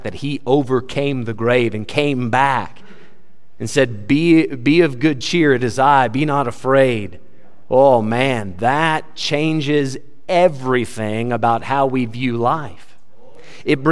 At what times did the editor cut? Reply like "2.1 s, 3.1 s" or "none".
none